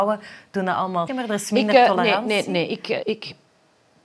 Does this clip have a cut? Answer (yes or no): yes